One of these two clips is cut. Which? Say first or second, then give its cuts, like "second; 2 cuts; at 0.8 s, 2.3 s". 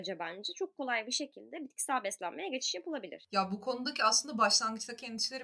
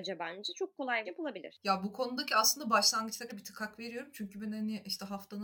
second; 2 cuts; at 1.1 s, 3.3 s